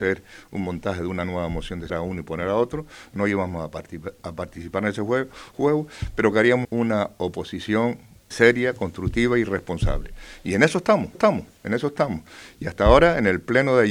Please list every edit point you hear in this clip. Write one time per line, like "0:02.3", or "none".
0:01.9
0:06.6
0:08.3
0:11.1